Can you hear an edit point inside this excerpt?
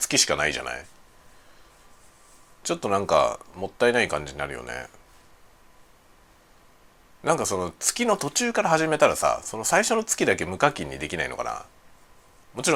no; 0 cuts

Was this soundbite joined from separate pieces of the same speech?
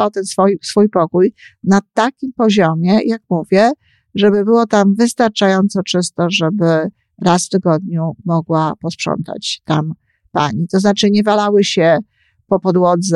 no; 0 cuts

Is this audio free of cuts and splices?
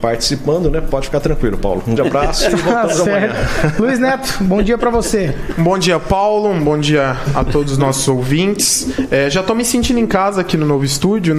no; 1 cut; at 2.0 s

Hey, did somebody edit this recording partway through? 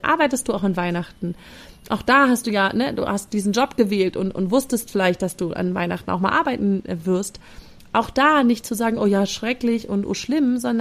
no; 0 cuts

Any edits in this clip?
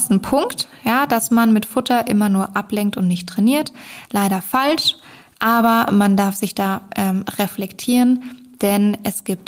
no; 0 cuts

